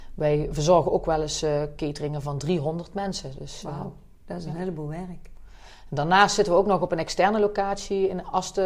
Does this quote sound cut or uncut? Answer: uncut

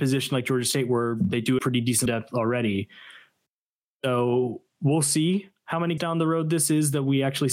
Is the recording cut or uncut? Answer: cut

